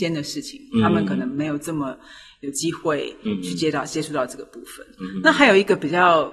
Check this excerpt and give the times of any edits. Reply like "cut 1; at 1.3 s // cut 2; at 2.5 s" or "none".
none